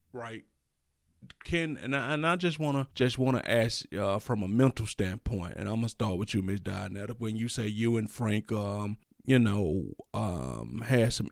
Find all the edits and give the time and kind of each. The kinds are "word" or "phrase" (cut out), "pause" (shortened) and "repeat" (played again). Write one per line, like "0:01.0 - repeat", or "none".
0:02.9 - pause
0:09.0 - pause